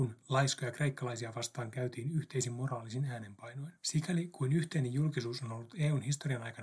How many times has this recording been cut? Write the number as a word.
one